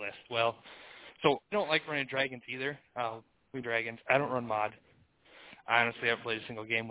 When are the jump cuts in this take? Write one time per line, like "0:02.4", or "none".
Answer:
0:01.5
0:03.6